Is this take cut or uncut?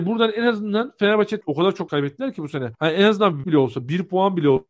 cut